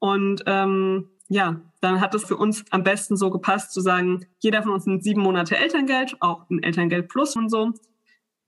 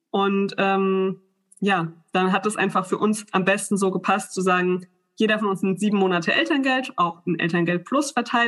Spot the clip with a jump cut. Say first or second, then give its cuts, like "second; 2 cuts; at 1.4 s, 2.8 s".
first; 4 cuts; at 1.2 s, 2.2 s, 4.3 s, 7.4 s